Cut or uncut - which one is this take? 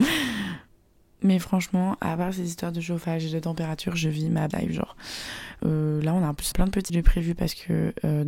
cut